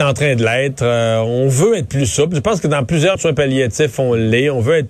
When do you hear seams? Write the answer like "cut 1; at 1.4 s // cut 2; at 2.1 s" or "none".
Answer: cut 1; at 3.2 s